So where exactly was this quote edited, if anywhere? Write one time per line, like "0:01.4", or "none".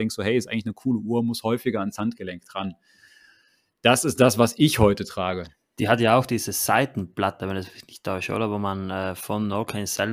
none